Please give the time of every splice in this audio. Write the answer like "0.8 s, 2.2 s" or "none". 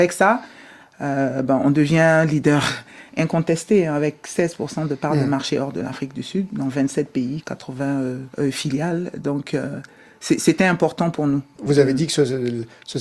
8.3 s